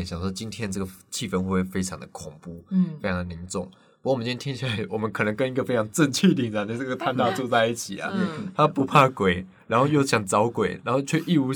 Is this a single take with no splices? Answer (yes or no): yes